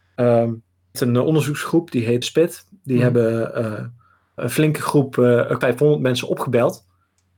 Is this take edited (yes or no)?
yes